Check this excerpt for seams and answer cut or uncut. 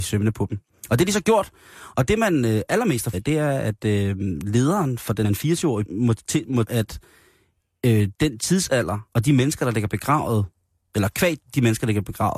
cut